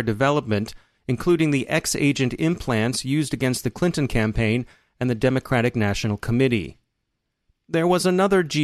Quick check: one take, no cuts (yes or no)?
yes